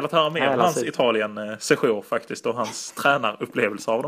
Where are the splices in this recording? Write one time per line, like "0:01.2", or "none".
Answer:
none